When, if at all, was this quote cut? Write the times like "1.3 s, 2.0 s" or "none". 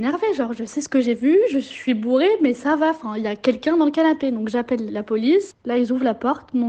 4.9 s